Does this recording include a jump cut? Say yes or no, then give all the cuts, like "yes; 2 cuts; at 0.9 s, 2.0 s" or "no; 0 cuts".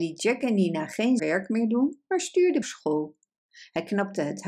yes; 2 cuts; at 1.2 s, 2.6 s